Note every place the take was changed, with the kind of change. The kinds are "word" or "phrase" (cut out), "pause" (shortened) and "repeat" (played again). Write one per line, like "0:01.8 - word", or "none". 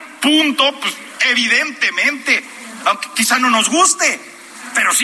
none